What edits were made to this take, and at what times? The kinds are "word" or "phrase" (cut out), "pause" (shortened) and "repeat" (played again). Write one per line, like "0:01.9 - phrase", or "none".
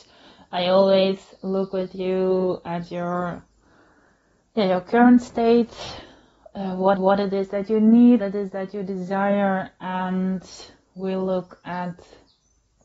0:07.0 - repeat
0:08.2 - word